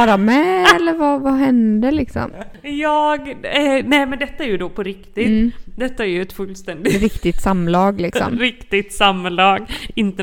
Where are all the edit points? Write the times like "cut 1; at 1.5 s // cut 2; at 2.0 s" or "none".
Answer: none